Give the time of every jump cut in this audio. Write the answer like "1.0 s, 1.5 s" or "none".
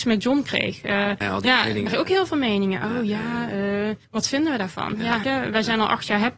1.2 s, 1.9 s, 4.0 s, 5.2 s